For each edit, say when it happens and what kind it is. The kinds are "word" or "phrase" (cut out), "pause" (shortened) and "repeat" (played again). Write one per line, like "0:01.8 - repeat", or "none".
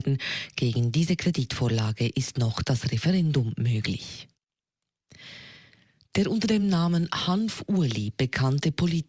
none